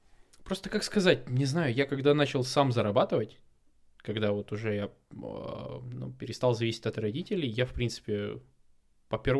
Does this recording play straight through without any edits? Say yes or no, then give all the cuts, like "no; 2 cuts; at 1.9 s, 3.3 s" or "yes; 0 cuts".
yes; 0 cuts